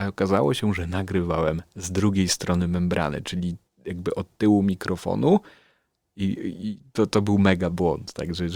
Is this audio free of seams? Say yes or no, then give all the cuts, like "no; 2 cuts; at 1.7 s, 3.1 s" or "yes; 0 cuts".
yes; 0 cuts